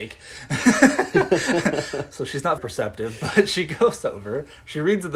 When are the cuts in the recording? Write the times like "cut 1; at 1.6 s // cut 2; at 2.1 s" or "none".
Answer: cut 1; at 2.6 s